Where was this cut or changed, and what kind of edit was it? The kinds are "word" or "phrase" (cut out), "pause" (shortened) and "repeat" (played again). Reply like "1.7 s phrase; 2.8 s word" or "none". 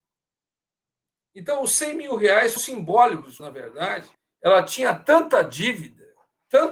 2.6 s word; 3.4 s phrase; 4.1 s pause